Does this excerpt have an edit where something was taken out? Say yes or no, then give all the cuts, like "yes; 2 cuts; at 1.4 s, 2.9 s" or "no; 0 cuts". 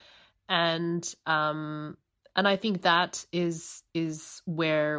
no; 0 cuts